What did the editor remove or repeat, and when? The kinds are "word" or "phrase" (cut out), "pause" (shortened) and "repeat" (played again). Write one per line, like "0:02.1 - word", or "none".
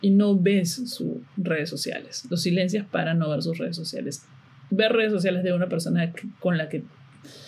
none